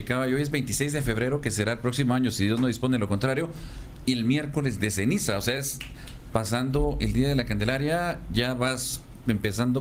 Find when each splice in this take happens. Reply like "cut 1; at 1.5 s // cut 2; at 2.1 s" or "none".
none